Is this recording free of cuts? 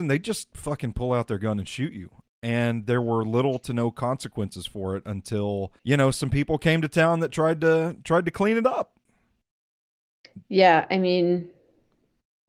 no; 1 cut; at 5.8 s

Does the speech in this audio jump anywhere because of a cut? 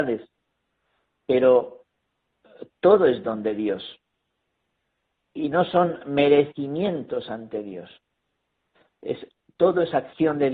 no; 0 cuts

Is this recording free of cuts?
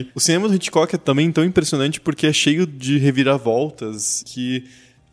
yes; 0 cuts

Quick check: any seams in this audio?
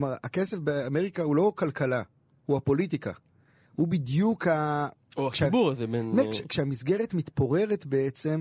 no; 0 cuts

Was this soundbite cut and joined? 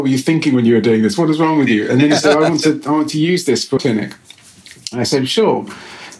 yes; 1 cut; at 3.8 s

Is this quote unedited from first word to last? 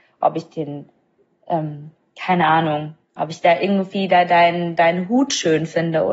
yes; 0 cuts

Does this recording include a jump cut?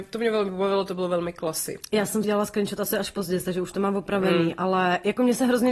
yes; 1 cut; at 2.2 s

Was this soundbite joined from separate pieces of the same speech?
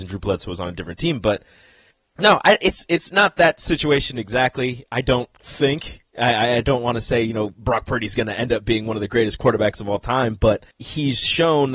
yes; 2 cuts; at 1.9 s, 10.7 s

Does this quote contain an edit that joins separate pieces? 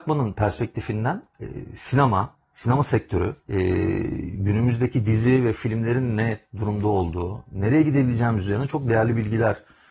yes; 2 cuts; at 1.3 s, 3.4 s

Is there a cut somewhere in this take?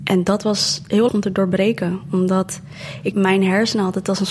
yes; 2 cuts; at 1.1 s, 3.1 s

